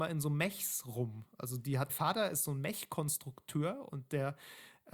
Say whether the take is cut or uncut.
cut